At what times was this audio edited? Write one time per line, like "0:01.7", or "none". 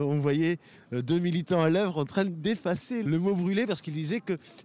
0:03.0